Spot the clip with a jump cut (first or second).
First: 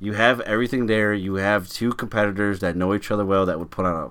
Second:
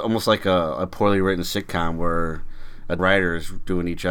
second